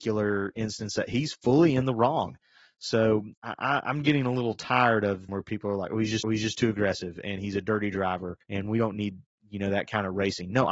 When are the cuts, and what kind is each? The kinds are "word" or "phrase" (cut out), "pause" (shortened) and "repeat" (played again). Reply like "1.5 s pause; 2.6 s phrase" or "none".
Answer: 3.3 s pause; 5.3 s phrase; 6.2 s repeat; 8.4 s pause